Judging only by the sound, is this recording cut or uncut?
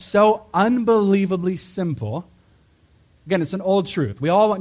uncut